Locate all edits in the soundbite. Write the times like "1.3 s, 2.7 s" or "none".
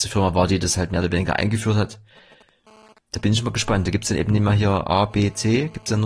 none